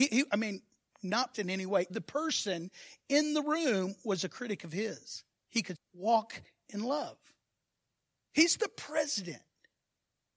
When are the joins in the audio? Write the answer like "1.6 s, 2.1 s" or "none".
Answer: 1.3 s, 1.9 s, 5.7 s